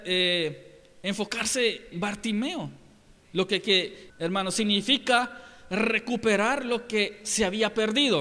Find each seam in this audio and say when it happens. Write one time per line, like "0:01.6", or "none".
0:01.9
0:04.1